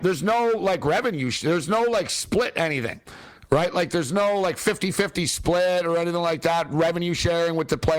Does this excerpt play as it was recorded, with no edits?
yes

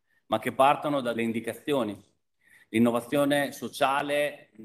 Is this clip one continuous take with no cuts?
no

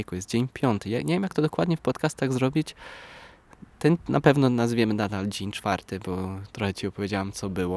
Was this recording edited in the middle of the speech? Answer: no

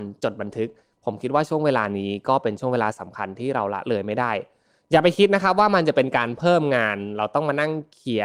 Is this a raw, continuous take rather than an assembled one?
yes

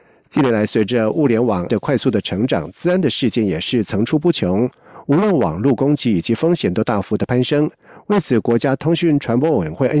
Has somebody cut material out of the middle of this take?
yes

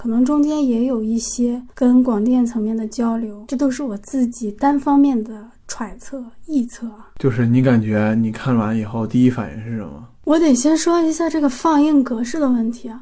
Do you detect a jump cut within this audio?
yes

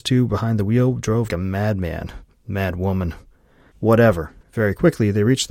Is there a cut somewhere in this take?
yes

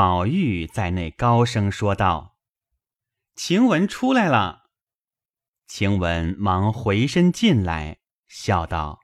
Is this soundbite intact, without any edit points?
yes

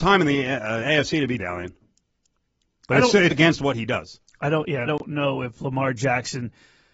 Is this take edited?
yes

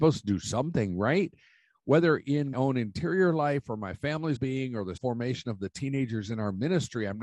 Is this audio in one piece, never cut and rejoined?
no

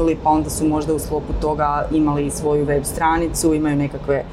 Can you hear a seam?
no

